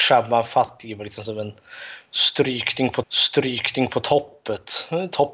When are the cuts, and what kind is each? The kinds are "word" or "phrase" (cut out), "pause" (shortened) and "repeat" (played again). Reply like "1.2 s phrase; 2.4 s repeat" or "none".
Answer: 3.0 s repeat